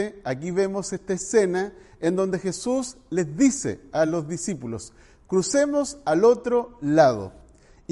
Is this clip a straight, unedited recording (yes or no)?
yes